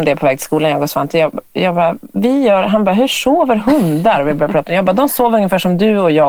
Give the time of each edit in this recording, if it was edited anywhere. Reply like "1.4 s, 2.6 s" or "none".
none